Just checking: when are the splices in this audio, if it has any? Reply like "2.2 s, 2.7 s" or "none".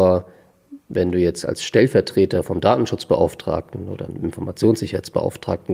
none